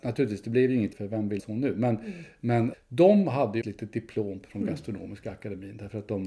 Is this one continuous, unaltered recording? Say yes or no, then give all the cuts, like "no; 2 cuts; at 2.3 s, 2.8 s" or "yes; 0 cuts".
no; 5 cuts; at 0.9 s, 1.4 s, 2.7 s, 3.6 s, 4.4 s